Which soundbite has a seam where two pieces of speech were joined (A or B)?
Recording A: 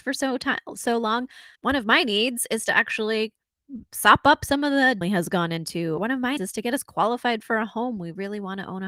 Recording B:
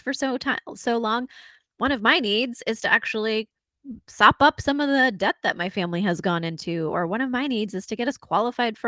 A